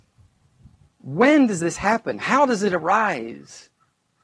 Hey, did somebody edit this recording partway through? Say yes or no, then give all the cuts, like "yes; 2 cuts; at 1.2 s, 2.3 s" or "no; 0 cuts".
no; 0 cuts